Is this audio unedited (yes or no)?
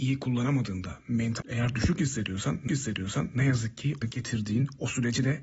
no